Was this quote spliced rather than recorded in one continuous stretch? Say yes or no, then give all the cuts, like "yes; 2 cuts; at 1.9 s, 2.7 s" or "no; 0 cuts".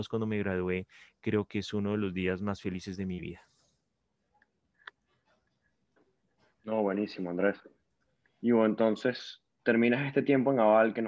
no; 0 cuts